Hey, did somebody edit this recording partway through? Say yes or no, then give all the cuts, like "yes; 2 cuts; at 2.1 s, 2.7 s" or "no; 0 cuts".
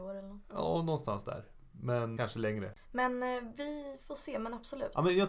yes; 1 cut; at 2.2 s